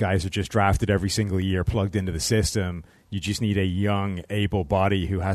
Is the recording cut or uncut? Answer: uncut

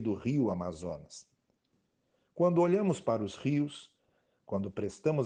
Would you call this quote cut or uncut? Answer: uncut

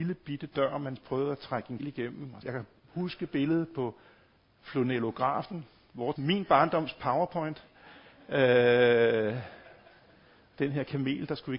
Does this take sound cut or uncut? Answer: cut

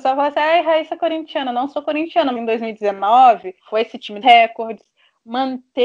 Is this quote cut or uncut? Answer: cut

